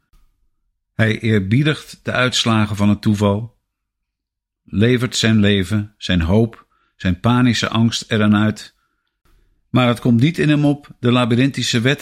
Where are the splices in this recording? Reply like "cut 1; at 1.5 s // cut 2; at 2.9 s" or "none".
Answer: none